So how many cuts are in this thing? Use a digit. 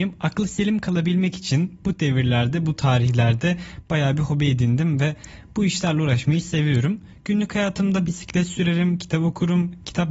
0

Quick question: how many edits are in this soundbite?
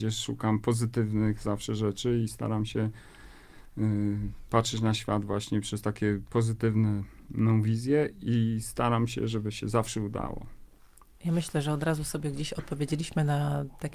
0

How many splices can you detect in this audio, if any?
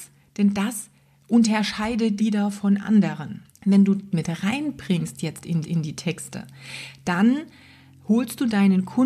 5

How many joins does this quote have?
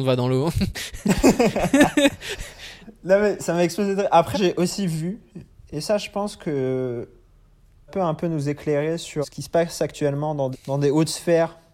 4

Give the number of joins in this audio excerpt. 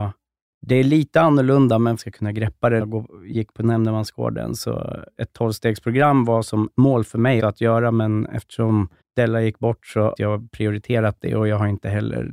7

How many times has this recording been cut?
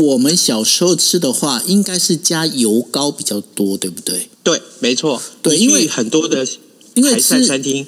1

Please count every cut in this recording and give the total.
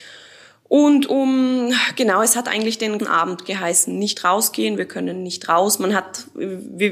1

